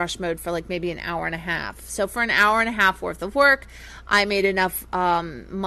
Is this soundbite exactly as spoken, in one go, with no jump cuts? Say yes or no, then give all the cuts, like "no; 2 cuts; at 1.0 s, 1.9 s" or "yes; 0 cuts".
yes; 0 cuts